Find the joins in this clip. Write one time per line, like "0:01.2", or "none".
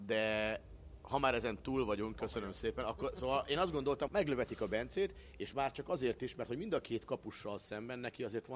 0:04.1